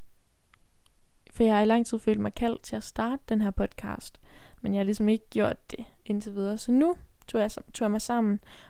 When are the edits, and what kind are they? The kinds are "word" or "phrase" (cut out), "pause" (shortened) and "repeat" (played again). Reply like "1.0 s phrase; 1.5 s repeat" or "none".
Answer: none